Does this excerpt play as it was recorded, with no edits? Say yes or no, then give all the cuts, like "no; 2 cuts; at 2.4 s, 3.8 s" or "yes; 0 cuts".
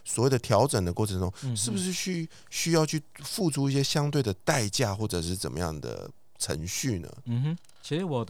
yes; 0 cuts